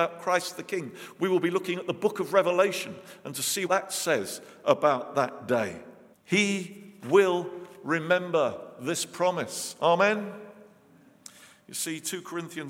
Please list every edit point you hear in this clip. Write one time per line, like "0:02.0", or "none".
0:03.7
0:06.1